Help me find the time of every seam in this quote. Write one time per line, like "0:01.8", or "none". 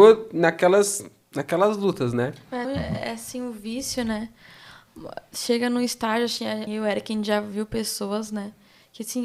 0:02.6
0:06.7

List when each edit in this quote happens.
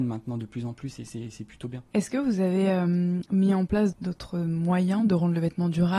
0:01.9

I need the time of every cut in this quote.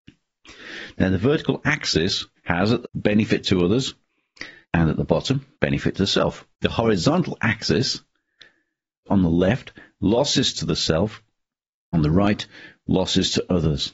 0:02.4
0:02.8
0:04.6
0:05.5
0:06.5
0:09.1
0:11.9

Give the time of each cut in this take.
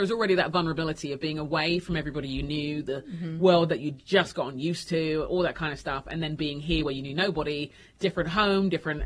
none

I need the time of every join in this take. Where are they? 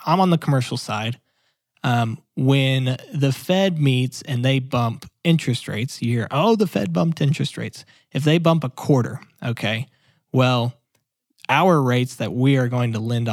none

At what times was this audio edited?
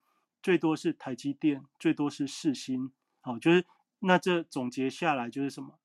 none

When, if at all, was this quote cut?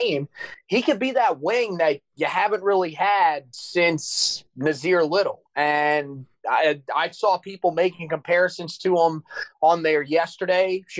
none

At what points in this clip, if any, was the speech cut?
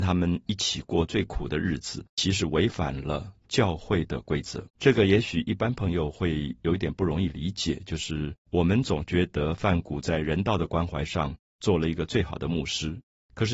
0:02.1
0:04.7
0:08.4

